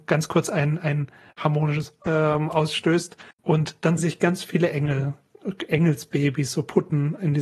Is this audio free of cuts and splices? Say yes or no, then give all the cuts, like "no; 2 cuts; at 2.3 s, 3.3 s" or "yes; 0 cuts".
no; 3 cuts; at 2.0 s, 3.3 s, 4.0 s